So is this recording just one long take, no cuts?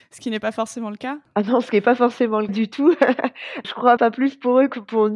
no; 4 cuts; at 1.2 s, 2.5 s, 3.6 s, 4.0 s

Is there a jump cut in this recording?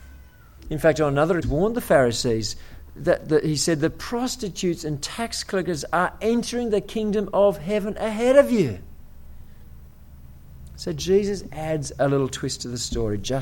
yes; 2 cuts; at 1.4 s, 2.9 s

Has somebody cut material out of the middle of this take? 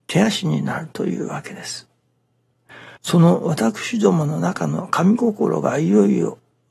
yes; 1 cut; at 3.0 s

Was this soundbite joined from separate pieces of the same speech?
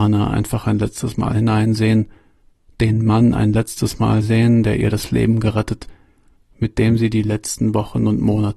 no; 0 cuts

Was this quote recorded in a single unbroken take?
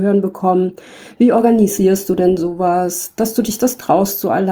yes; 0 cuts

